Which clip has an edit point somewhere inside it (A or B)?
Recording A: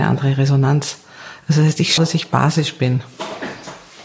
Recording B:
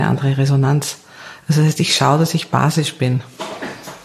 A